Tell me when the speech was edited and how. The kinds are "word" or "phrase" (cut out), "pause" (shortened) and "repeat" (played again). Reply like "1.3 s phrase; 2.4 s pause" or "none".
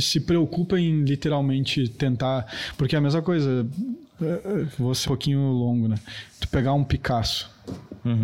5.0 s word